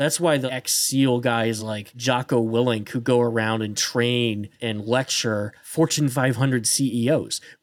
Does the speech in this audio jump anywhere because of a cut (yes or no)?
no